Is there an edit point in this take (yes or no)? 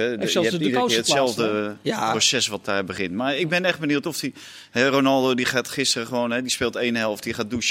no